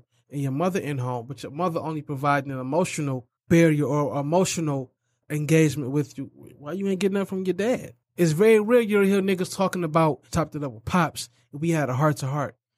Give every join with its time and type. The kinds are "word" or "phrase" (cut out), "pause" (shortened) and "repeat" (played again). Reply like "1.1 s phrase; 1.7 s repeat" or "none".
3.4 s pause; 5.2 s word; 8.0 s pause; 10.3 s phrase